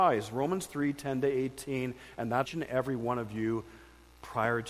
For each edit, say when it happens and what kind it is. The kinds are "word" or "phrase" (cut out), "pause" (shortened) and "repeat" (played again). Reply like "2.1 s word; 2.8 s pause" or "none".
2.5 s phrase